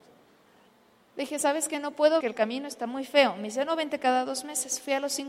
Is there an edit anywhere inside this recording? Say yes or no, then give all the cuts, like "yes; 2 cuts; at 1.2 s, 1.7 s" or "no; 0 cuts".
yes; 1 cut; at 2.2 s